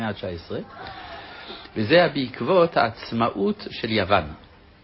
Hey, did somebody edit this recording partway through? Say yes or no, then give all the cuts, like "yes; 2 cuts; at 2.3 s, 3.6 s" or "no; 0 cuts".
no; 0 cuts